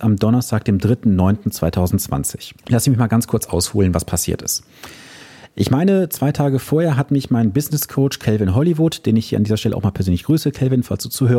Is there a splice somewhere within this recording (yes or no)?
yes